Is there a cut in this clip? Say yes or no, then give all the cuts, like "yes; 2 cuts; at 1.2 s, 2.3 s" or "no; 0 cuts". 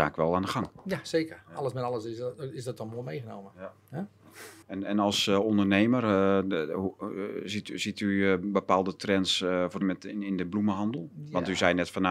yes; 2 cuts; at 4.6 s, 9.8 s